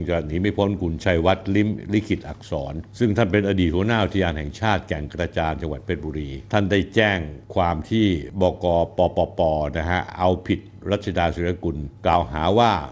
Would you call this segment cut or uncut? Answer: uncut